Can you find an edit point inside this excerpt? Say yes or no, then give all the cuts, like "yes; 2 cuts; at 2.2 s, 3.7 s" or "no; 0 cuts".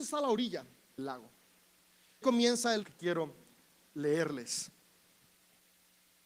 yes; 3 cuts; at 1.0 s, 2.2 s, 2.8 s